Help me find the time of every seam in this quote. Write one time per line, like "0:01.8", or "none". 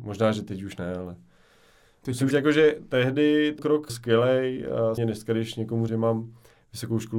0:02.3
0:03.6
0:03.9
0:05.0
0:05.9